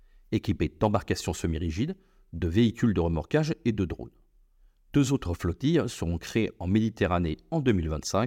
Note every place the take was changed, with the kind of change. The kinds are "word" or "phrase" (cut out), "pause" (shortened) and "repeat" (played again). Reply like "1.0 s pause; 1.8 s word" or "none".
none